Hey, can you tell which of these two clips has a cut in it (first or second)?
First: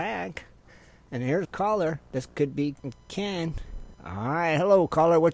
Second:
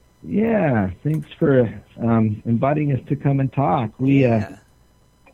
first